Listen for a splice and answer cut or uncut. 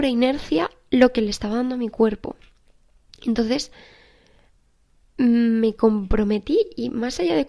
uncut